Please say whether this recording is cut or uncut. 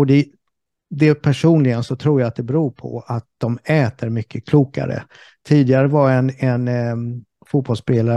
uncut